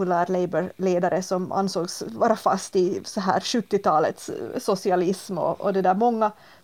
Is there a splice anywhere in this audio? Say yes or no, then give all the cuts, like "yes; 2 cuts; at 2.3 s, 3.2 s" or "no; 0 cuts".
no; 0 cuts